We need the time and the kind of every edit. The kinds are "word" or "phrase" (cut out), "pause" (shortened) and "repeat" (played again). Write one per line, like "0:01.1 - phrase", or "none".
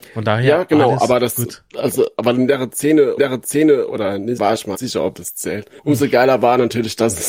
0:03.2 - repeat
0:04.4 - word
0:04.7 - phrase
0:05.8 - pause